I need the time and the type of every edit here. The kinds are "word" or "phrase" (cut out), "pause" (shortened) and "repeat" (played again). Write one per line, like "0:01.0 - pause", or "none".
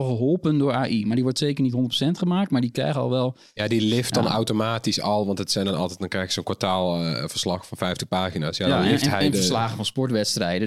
none

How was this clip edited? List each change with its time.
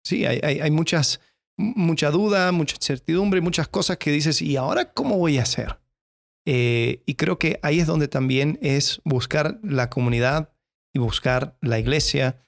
none

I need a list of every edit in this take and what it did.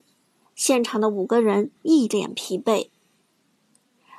0:01.8 - pause

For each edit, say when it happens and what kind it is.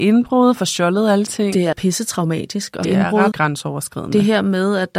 0:01.3 - word
0:01.7 - word
0:02.8 - word
0:03.3 - word

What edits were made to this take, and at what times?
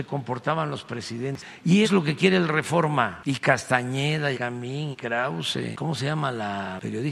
0:01.8 - word
0:04.3 - word
0:04.9 - word

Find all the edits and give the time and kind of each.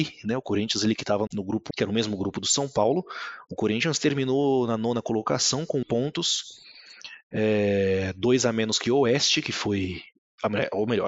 0:01.3 - word
0:01.7 - word
0:05.8 - word

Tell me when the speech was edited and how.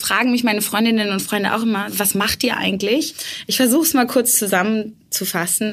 none

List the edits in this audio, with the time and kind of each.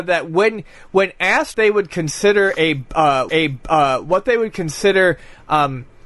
0:01.5 - word
0:03.3 - repeat

